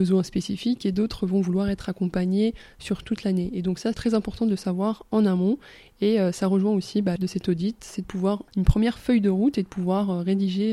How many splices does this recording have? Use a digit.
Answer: 3